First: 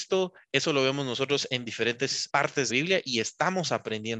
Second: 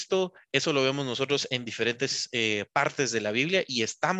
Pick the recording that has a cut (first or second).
first